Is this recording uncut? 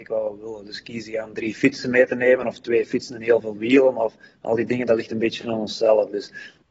yes; 0 cuts

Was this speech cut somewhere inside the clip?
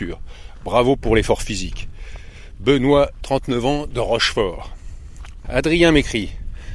no; 0 cuts

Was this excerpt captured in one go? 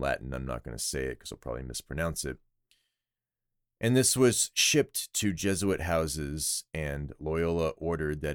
yes; 0 cuts

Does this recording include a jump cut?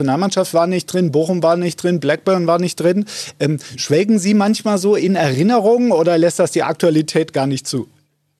no; 0 cuts

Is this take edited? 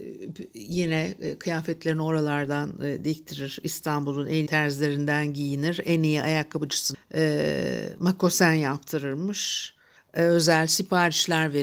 yes; 3 cuts; at 4.5 s, 6.9 s, 10.0 s

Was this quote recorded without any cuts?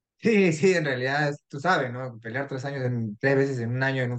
yes; 0 cuts

